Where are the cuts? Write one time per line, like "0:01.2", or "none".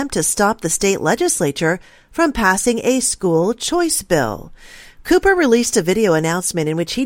none